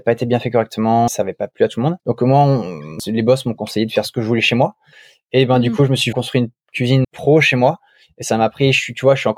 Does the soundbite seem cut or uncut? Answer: cut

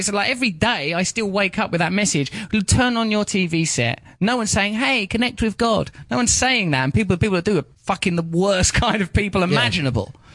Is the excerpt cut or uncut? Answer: uncut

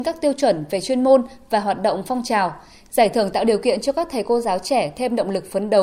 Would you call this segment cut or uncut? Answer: uncut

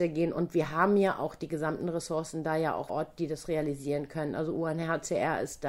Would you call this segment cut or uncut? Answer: cut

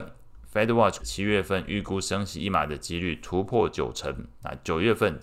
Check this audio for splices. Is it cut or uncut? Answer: cut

